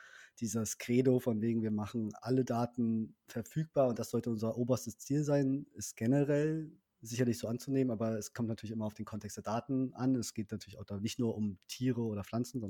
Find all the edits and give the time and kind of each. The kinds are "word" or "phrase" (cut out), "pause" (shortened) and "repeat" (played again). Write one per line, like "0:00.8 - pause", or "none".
none